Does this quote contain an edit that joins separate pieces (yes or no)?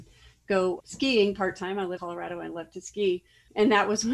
yes